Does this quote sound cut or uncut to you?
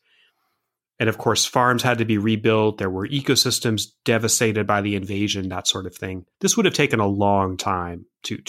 cut